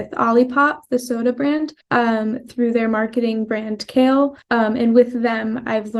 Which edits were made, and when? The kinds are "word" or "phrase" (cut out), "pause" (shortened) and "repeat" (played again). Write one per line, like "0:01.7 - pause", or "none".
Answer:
0:01.8 - pause
0:04.4 - pause